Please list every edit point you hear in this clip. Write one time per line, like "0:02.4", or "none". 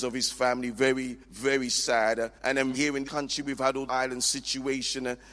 0:01.2
0:02.4
0:02.7
0:03.0
0:03.9